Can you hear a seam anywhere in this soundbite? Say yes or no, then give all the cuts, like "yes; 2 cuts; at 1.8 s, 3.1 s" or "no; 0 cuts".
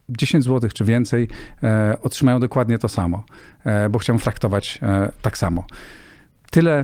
yes; 1 cut; at 4.2 s